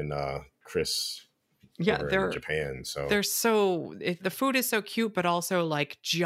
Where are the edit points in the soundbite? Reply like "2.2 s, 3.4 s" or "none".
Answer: 4.2 s